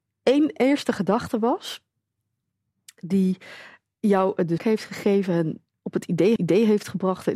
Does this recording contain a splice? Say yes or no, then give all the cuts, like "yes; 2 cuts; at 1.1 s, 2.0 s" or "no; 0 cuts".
yes; 2 cuts; at 4.6 s, 6.4 s